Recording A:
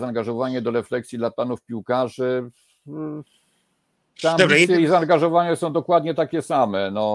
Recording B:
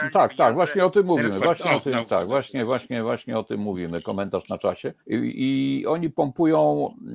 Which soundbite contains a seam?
B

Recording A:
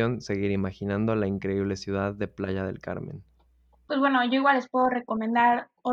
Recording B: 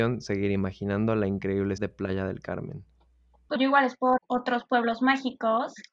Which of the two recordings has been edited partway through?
B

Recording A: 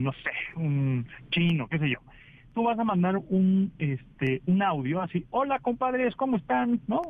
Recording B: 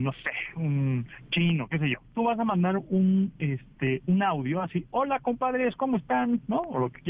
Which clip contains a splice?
B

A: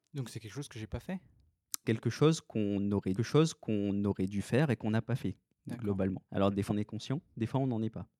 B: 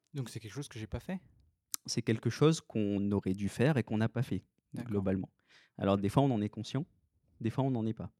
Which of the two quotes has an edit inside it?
A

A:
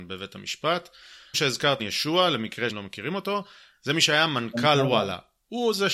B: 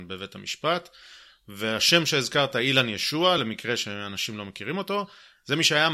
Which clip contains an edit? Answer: A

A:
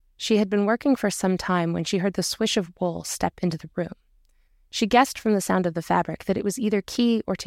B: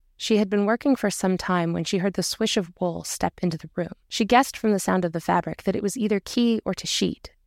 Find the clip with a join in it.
B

